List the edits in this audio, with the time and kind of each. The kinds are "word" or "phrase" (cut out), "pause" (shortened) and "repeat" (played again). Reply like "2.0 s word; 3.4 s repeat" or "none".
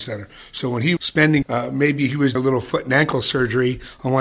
1.0 s word; 1.4 s phrase; 2.3 s word